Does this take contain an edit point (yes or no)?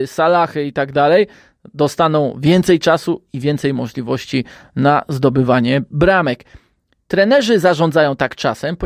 no